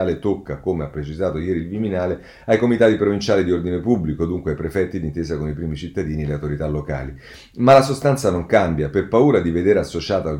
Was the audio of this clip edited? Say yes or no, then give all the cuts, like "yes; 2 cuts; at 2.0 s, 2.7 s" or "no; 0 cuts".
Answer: no; 0 cuts